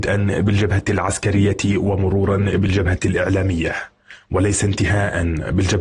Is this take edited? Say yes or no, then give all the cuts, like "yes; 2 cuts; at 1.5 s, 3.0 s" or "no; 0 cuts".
no; 0 cuts